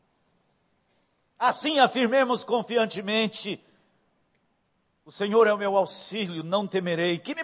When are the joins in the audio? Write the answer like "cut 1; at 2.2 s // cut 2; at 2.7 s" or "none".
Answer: none